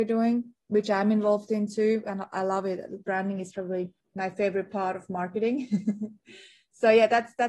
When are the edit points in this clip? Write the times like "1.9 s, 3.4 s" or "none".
4.0 s